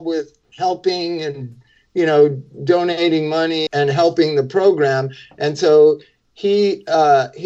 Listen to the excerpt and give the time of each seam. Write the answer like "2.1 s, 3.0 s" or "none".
3.7 s